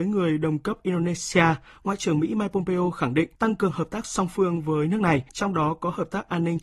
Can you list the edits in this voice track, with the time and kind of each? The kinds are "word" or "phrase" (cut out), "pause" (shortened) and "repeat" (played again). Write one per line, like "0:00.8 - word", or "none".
0:03.3 - pause
0:05.3 - pause